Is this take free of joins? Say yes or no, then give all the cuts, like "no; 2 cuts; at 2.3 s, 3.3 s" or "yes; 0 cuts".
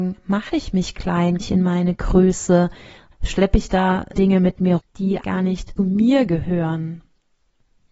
no; 6 cuts; at 1.4 s, 3.1 s, 4.1 s, 4.8 s, 5.2 s, 5.8 s